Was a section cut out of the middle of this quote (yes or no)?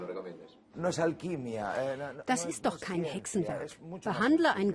no